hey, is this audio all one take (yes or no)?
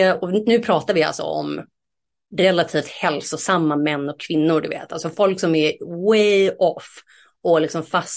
yes